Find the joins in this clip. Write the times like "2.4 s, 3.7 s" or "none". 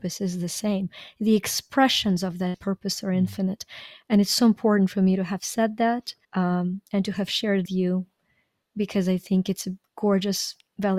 6.2 s, 7.7 s